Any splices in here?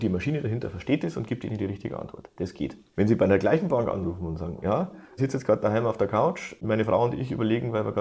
no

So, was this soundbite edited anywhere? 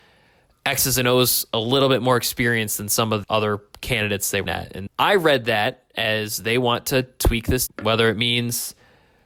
yes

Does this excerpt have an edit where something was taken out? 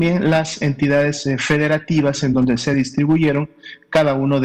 no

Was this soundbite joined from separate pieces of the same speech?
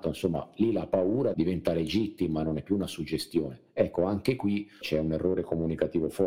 yes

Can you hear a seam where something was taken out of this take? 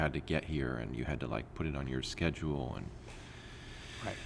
no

